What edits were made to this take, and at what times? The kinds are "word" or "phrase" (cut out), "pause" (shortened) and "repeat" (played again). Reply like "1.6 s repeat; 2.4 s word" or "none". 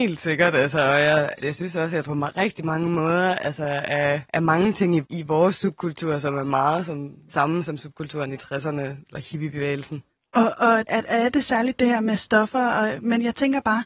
1.4 s word; 2.0 s phrase; 4.3 s pause; 5.0 s phrase; 7.3 s word; 10.1 s pause; 10.9 s word